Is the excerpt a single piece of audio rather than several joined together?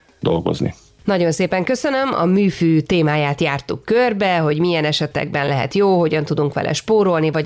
yes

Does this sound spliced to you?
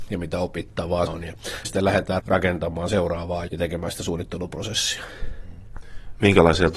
yes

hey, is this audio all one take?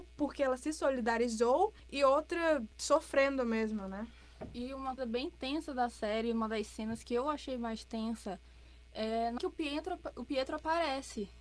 no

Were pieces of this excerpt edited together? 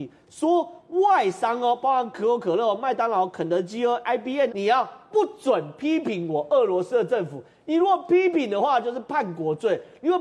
yes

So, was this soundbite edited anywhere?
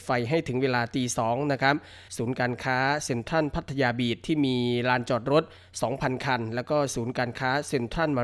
yes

